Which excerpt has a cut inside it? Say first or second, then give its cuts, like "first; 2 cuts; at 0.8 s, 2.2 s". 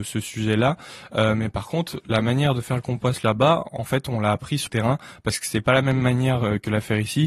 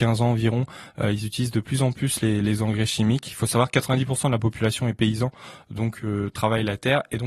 first; 1 cut; at 4.7 s